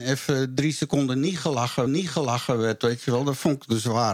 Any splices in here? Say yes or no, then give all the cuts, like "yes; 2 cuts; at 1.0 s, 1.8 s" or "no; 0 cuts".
yes; 1 cut; at 1.9 s